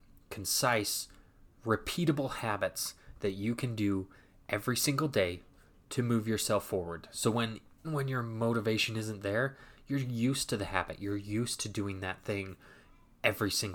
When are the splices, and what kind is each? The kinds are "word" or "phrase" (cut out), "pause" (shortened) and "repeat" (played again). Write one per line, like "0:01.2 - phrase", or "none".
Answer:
0:07.8 - word